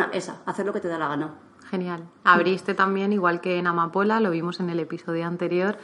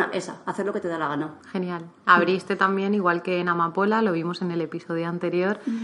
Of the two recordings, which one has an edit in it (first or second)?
second